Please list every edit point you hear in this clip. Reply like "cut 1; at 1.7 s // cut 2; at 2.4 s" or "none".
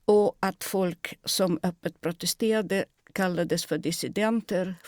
none